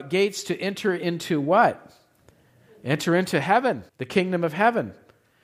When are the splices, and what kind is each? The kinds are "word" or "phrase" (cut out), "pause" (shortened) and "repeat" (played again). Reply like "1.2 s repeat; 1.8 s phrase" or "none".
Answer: 3.9 s pause

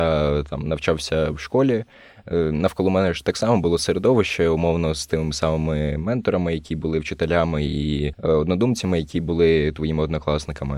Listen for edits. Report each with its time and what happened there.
none

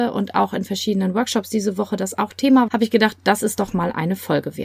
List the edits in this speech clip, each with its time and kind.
2.7 s word

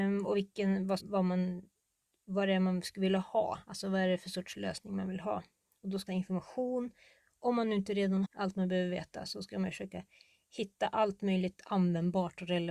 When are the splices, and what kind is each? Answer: 1.0 s word; 6.1 s phrase; 8.2 s word

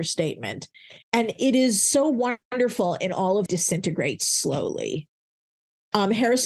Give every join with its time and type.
1.0 s pause; 3.5 s phrase

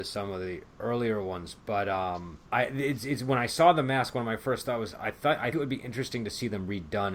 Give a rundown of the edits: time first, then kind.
1.6 s pause; 2.4 s pause; 5.5 s word

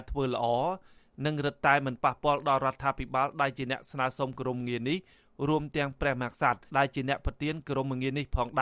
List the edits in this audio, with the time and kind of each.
6.7 s pause

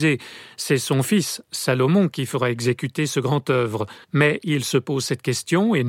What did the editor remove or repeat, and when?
4.0 s pause

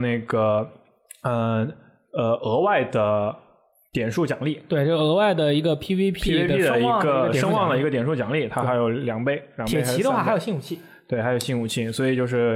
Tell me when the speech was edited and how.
none

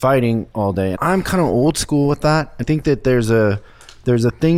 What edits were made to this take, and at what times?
0.9 s word; 2.6 s word

